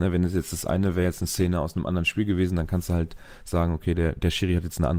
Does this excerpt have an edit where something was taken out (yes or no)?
no